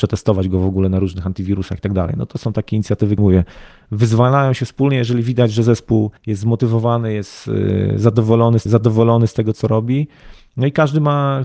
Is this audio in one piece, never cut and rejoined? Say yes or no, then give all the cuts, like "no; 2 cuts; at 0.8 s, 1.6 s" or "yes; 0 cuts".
no; 3 cuts; at 3.2 s, 6.2 s, 8.7 s